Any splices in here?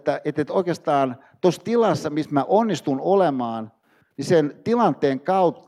no; 0 cuts

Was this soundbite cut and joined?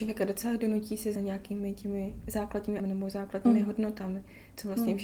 yes; 2 cuts; at 1.1 s, 2.8 s

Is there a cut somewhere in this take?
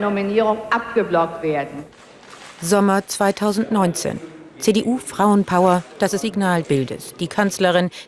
yes; 2 cuts; at 6.2 s, 6.6 s

